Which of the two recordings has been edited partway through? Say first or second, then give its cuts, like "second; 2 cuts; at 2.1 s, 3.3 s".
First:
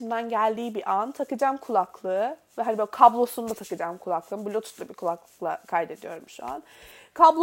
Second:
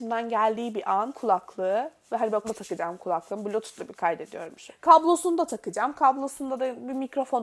second; 4 cuts; at 1.1 s, 2.4 s, 3.9 s, 4.7 s